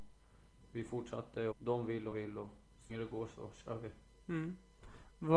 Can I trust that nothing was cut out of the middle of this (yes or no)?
no